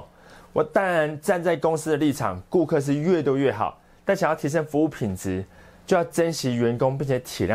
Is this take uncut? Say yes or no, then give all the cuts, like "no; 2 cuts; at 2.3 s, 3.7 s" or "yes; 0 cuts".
yes; 0 cuts